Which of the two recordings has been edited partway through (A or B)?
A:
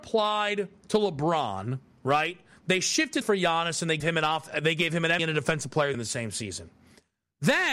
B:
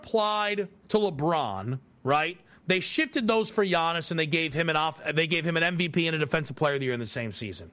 A